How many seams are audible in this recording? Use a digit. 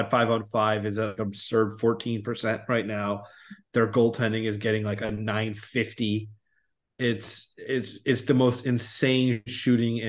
1